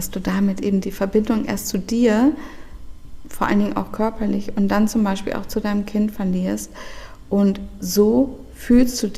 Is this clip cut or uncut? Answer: uncut